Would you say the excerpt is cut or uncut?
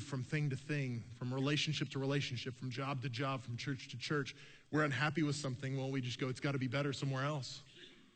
uncut